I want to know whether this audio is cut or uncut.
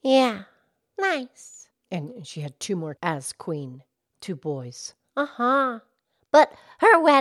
cut